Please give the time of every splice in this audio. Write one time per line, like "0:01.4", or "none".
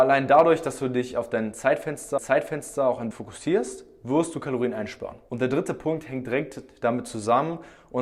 0:02.2
0:03.1